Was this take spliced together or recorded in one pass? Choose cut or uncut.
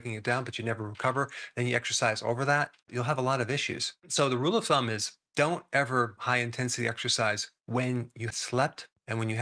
cut